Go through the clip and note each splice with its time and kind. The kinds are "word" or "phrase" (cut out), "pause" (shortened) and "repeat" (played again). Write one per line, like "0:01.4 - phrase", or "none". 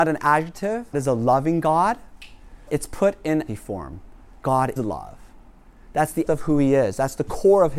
0:00.9 - word
0:02.7 - word
0:03.5 - word
0:04.8 - word
0:06.3 - word